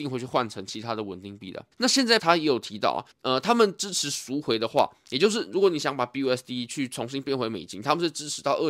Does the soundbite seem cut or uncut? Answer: cut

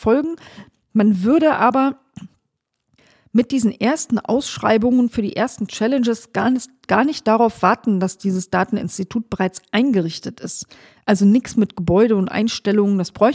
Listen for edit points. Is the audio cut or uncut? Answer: uncut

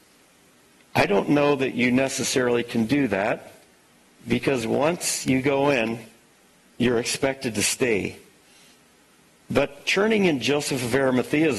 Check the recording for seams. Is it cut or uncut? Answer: uncut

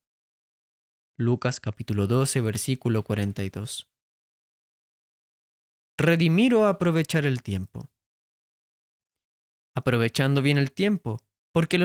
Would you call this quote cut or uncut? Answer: uncut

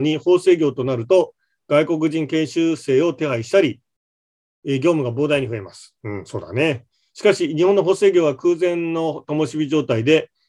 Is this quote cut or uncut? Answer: uncut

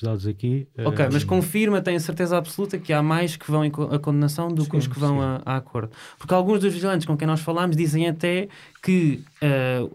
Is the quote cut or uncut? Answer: uncut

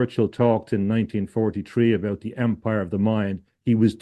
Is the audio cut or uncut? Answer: uncut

